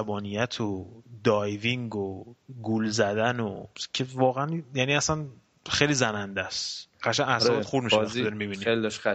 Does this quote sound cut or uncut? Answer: uncut